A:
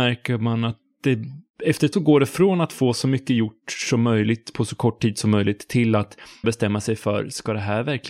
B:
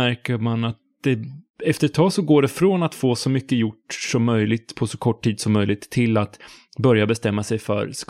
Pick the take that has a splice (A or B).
A